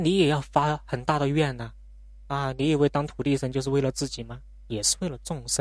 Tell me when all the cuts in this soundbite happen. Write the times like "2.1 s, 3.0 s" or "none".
none